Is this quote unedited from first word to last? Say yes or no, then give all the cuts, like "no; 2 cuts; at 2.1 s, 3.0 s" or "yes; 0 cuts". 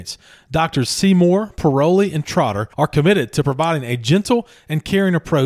no; 1 cut; at 2.7 s